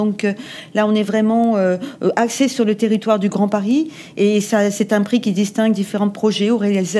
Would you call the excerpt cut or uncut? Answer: uncut